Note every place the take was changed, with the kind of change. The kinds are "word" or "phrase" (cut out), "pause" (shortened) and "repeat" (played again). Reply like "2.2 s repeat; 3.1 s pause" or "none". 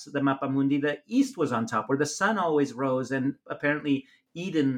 3.4 s pause

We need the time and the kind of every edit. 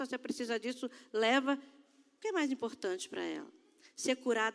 none

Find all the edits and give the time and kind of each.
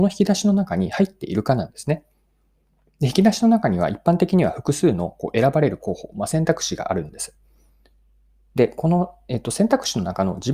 none

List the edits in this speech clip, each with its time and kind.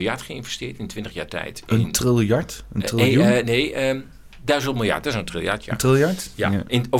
none

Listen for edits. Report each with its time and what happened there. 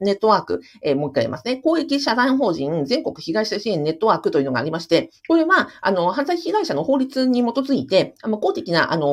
5.2 s pause

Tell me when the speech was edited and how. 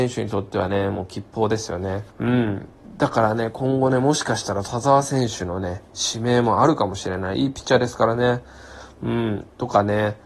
2.1 s pause

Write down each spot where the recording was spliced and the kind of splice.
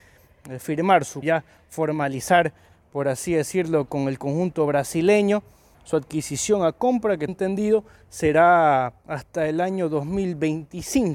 1.2 s word; 5.7 s word; 7.3 s word

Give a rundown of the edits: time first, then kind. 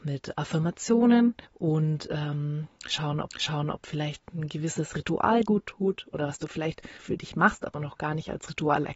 1.4 s pause; 3.3 s repeat; 5.4 s word; 7.0 s phrase

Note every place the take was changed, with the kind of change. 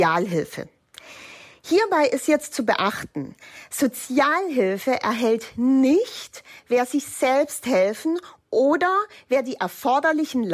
none

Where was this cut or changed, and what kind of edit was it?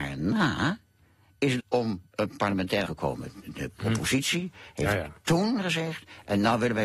1.6 s phrase; 2.8 s word

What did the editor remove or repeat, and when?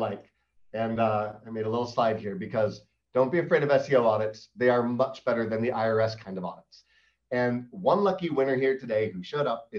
none

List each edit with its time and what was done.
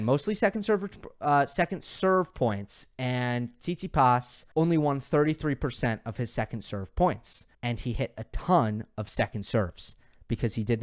4.5 s pause; 7.5 s pause

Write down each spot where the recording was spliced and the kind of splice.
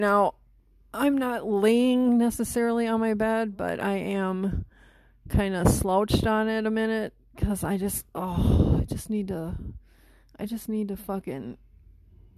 none

